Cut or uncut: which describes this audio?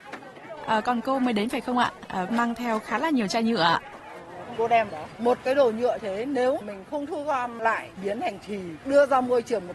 cut